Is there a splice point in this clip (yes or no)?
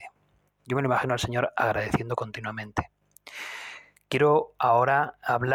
no